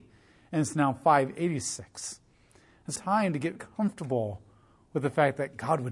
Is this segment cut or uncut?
cut